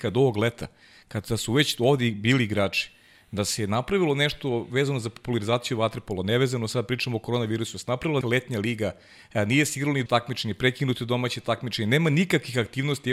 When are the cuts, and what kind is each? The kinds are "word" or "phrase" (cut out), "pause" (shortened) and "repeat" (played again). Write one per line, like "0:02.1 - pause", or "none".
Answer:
0:08.2 - word
0:10.1 - word